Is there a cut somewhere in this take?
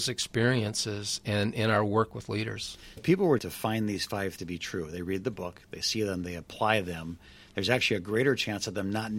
yes; 3 cuts; at 3.0 s, 3.4 s, 4.4 s

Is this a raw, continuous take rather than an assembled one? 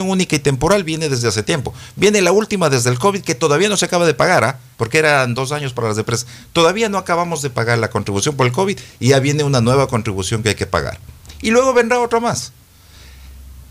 no; 1 cut; at 4.7 s

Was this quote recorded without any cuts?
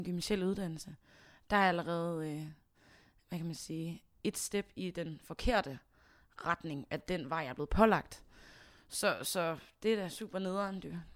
yes; 0 cuts

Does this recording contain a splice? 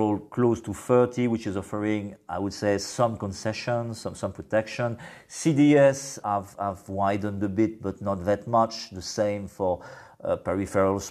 yes; 1 cut; at 6.2 s

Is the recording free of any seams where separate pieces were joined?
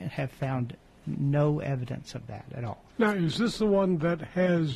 no; 1 cut; at 2.9 s

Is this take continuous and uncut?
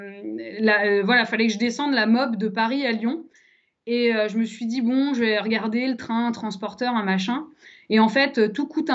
yes; 0 cuts

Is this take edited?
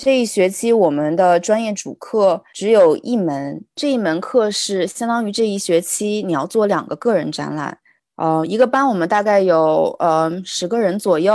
no; 0 cuts

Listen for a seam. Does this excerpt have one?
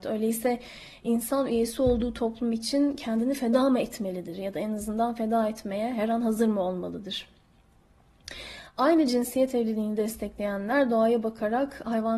no; 0 cuts

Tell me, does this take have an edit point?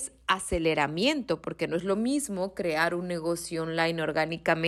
no; 0 cuts

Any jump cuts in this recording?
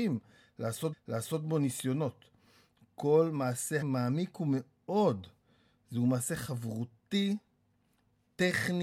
yes; 2 cuts; at 0.9 s, 3.8 s

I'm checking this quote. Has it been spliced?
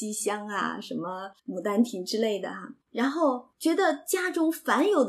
yes; 3 cuts; at 1.4 s, 2.8 s, 3.5 s

